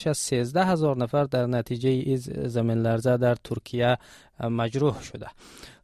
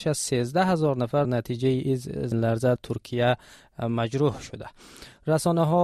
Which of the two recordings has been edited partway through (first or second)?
second